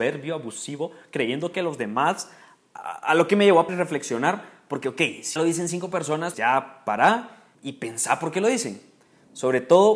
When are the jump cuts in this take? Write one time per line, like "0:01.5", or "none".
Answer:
0:01.5
0:03.7
0:05.4
0:06.3
0:07.5